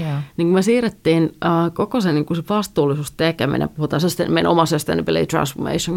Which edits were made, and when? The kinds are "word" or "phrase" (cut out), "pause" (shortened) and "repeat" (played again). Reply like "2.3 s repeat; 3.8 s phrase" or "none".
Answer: none